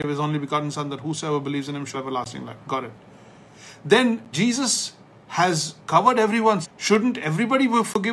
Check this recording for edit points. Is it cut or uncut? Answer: cut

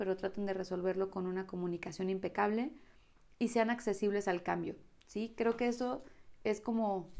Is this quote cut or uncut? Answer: uncut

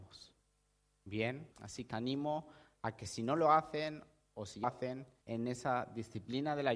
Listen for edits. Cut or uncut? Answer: cut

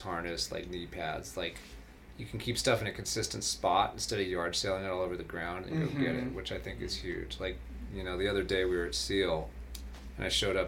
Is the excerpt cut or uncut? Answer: uncut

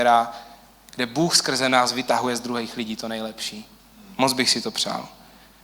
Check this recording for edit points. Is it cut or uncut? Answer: uncut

